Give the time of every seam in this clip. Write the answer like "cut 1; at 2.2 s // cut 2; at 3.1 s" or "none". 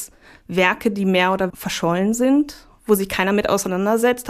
cut 1; at 1.5 s